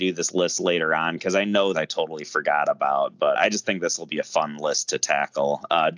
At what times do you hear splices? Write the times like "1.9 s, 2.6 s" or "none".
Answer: 1.7 s, 3.4 s